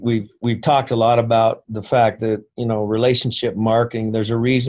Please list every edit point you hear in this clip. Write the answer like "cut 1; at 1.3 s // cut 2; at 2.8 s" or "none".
none